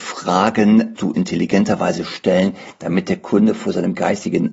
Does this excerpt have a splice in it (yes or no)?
yes